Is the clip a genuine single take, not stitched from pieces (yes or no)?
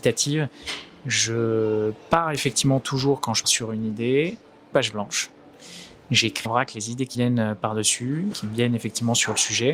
no